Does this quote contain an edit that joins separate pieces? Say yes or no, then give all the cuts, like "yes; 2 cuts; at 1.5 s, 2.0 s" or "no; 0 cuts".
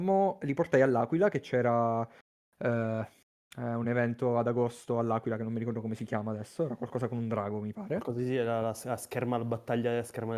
no; 0 cuts